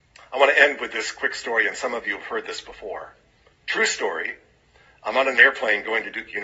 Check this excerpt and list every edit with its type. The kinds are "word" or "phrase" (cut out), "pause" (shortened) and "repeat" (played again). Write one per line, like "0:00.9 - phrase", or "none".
none